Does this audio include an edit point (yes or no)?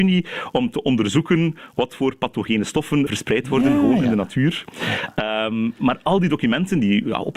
yes